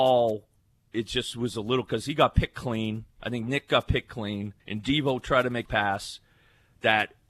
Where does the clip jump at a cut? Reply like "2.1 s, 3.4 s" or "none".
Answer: 4.6 s, 5.7 s